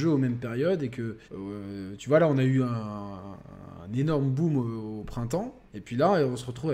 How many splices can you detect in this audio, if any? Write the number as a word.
two